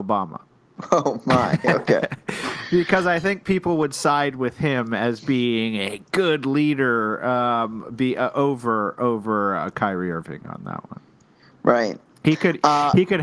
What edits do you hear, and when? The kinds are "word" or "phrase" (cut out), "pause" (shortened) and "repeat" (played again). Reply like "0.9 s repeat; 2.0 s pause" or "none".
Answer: none